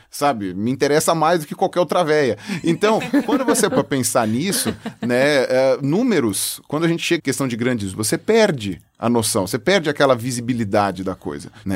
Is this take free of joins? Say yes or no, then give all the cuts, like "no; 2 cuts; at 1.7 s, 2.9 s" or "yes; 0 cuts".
no; 3 cuts; at 3.7 s, 7.2 s, 7.9 s